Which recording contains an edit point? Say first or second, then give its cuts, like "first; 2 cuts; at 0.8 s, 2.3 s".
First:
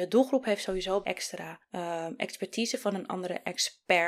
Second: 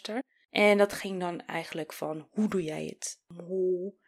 first; 1 cut; at 1.0 s